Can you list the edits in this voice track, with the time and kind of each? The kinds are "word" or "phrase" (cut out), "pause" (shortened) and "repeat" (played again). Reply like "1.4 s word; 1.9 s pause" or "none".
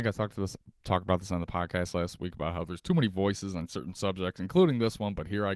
none